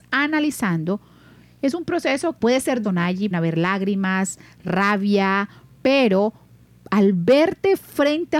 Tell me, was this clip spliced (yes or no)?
yes